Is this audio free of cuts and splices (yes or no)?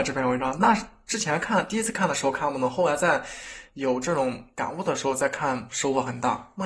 no